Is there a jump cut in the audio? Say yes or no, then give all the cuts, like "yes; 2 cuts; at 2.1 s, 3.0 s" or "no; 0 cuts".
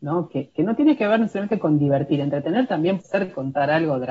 yes; 1 cut; at 3.0 s